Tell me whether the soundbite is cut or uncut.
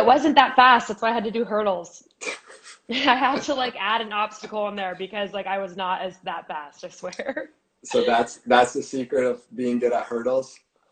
uncut